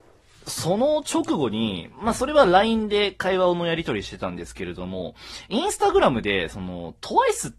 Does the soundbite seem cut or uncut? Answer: uncut